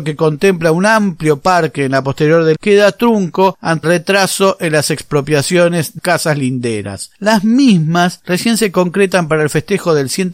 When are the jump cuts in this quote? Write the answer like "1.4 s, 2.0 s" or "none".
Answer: 2.0 s, 2.6 s, 3.8 s, 6.0 s